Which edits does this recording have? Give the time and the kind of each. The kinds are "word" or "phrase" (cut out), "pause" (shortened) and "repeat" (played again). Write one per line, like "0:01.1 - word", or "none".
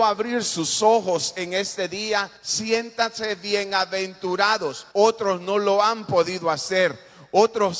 0:02.4 - pause
0:04.9 - pause